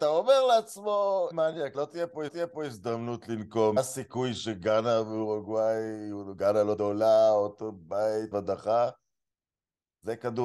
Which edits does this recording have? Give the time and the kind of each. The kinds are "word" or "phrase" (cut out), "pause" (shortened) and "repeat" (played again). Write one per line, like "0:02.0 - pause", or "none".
0:01.3 - word
0:01.7 - word
0:02.3 - repeat
0:03.8 - word
0:06.8 - word
0:08.3 - word